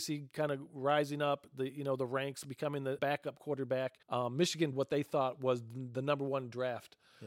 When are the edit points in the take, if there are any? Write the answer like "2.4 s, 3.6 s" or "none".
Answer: 3.0 s, 4.0 s, 4.7 s